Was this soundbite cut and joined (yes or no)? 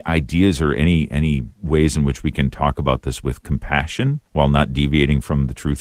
yes